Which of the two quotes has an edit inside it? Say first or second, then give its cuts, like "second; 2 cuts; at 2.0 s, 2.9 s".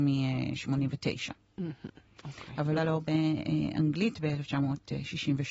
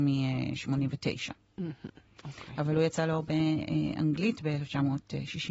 first; 1 cut; at 2.8 s